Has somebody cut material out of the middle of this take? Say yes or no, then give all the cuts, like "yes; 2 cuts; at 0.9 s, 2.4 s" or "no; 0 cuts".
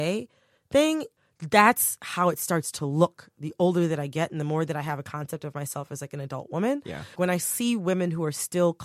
yes; 1 cut; at 7.2 s